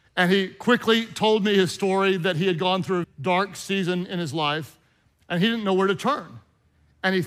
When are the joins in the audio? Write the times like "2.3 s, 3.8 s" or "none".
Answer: 3.0 s